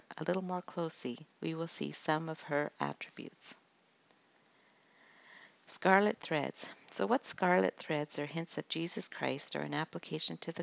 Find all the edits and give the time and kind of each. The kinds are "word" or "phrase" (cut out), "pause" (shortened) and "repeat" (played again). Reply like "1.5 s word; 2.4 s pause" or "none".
1.3 s pause